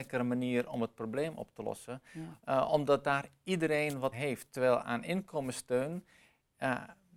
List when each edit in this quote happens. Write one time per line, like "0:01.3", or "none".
0:04.1